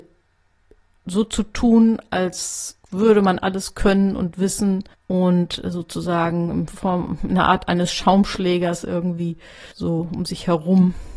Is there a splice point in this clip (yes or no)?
yes